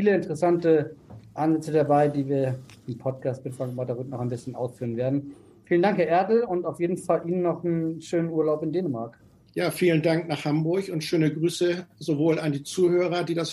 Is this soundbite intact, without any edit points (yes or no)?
yes